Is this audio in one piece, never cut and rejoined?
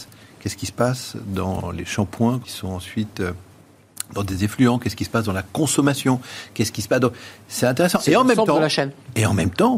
no; 1 cut; at 2.4 s

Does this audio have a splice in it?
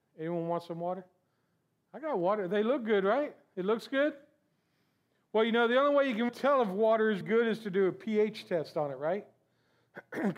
yes; 2 cuts; at 6.3 s, 7.2 s

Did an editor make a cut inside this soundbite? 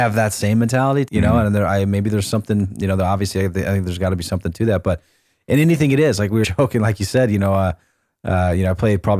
yes; 2 cuts; at 1.1 s, 6.4 s

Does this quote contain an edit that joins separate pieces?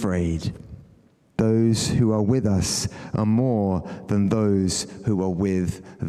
no; 0 cuts

